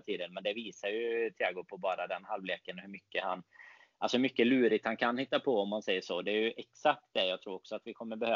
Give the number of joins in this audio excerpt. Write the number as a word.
zero